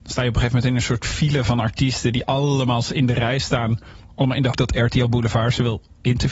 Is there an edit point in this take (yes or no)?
yes